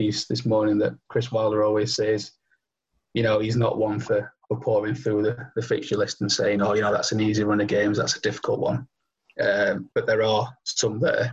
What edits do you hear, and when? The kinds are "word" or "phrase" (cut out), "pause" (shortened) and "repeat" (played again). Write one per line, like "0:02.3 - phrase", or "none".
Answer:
0:09.9 - pause